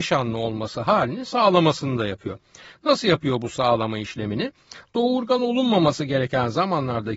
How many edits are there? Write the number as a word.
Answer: zero